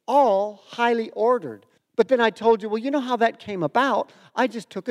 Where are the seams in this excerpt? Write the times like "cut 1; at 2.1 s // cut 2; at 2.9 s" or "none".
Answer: cut 1; at 1.8 s